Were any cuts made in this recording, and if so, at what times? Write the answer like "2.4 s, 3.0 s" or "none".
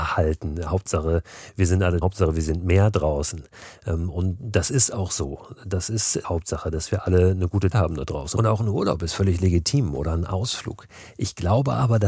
2.0 s, 6.2 s, 7.7 s